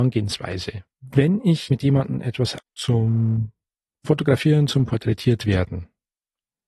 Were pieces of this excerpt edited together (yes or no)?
yes